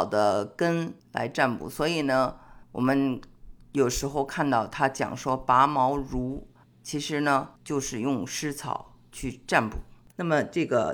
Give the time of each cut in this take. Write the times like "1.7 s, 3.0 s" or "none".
1.0 s, 2.6 s, 7.6 s